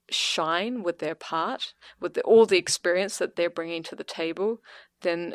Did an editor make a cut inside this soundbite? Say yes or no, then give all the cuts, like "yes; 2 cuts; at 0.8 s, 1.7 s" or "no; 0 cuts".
no; 0 cuts